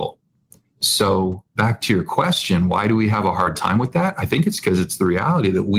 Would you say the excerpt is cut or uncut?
cut